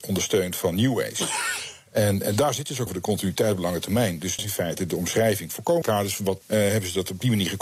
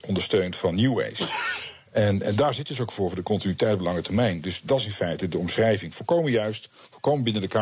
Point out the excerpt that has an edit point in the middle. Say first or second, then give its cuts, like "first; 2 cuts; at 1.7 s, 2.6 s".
first; 4 cuts; at 2.9 s, 4.4 s, 5.8 s, 6.4 s